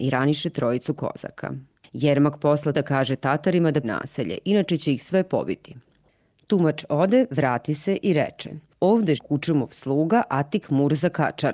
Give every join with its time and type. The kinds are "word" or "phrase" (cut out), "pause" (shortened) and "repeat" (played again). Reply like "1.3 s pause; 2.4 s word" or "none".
2.7 s word; 3.8 s word; 9.2 s word